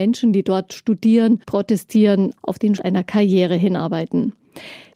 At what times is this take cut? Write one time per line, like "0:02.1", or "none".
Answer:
0:01.4
0:02.8